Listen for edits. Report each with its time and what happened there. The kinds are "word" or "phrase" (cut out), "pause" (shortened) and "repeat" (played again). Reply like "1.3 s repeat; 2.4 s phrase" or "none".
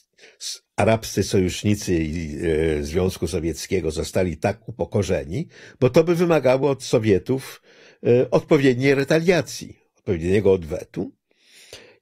none